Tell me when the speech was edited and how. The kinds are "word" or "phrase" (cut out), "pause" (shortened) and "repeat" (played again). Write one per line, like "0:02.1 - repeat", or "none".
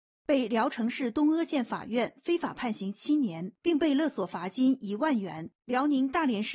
0:03.6 - pause
0:05.6 - pause